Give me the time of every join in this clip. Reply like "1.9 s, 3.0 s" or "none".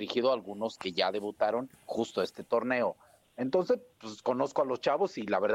1.8 s